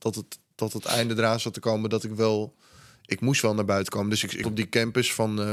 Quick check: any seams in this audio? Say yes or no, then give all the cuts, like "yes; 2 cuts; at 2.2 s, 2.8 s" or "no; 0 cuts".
yes; 1 cut; at 4.4 s